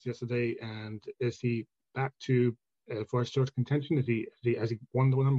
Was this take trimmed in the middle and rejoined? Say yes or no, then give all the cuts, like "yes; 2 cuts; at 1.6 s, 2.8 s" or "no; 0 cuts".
no; 0 cuts